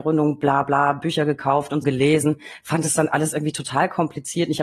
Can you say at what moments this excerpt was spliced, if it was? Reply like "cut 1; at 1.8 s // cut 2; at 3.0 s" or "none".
cut 1; at 1.8 s